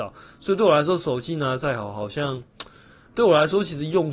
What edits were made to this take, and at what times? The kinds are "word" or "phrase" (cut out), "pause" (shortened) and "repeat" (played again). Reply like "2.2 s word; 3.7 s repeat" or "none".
3.1 s word